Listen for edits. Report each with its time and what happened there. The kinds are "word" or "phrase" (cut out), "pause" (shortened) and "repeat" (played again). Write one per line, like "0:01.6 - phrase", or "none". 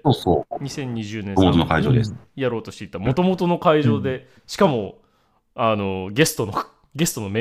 0:04.4 - pause